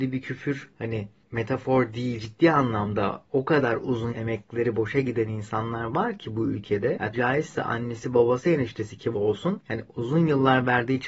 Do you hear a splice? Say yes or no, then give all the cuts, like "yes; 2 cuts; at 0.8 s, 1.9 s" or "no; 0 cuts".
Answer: yes; 4 cuts; at 2.2 s, 4.1 s, 7.1 s, 9.1 s